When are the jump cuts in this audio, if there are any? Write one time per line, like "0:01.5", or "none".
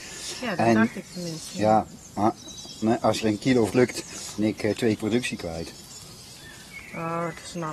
0:02.8
0:03.2
0:03.7
0:04.4
0:05.0